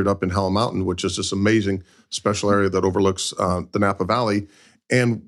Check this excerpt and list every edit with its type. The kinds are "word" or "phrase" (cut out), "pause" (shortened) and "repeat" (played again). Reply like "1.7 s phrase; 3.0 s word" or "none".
none